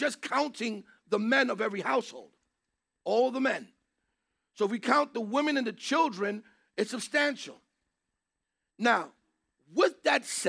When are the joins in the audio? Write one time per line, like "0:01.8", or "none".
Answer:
none